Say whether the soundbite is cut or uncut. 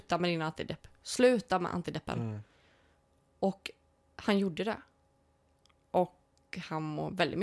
uncut